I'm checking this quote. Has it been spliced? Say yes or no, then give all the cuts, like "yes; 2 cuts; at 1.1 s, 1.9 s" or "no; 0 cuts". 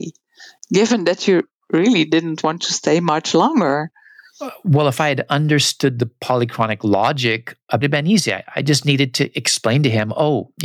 yes; 1 cut; at 7.8 s